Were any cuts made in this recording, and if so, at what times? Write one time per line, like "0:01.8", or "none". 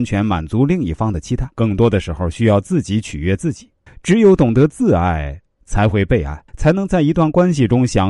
0:01.5
0:03.9
0:06.5